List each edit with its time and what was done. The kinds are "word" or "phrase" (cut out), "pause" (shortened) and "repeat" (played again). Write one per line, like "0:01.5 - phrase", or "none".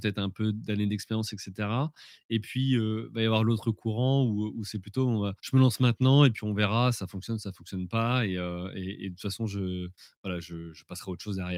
0:05.4 - pause